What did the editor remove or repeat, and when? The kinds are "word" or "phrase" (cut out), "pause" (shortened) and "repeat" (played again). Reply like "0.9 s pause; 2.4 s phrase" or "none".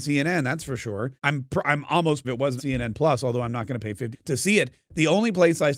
1.2 s pause; 2.2 s word; 2.6 s word; 4.1 s word